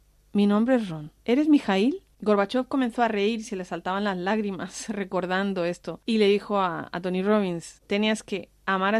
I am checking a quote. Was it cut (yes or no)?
yes